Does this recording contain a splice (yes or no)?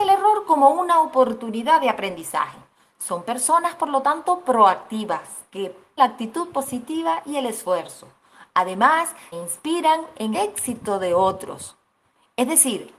yes